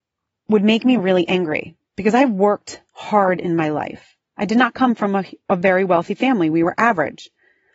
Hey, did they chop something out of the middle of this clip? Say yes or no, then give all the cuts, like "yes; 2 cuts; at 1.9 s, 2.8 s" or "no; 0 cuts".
no; 0 cuts